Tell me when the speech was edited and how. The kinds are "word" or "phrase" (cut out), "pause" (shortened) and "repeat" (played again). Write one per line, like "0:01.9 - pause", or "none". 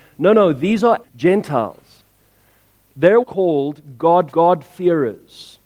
0:01.0 - word
0:03.2 - word
0:04.3 - repeat